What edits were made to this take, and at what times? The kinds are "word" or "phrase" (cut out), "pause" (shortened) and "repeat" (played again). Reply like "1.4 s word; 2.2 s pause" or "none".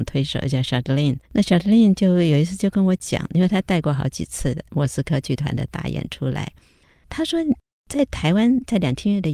1.3 s pause